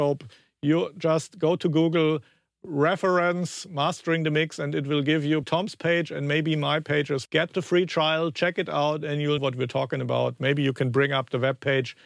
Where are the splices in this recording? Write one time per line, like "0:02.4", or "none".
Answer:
0:05.4
0:07.3
0:09.4